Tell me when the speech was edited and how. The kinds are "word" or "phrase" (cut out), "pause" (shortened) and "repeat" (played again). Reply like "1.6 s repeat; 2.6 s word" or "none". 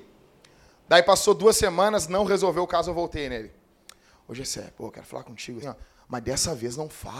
5.6 s word